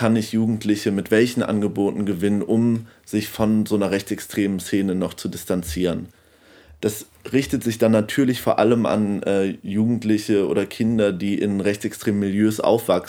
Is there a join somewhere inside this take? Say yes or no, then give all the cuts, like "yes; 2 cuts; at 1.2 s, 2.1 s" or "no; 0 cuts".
no; 0 cuts